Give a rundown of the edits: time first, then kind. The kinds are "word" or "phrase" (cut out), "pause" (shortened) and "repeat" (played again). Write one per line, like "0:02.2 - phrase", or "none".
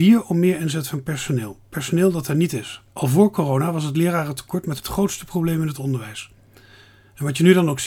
0:02.9 - pause
0:04.8 - word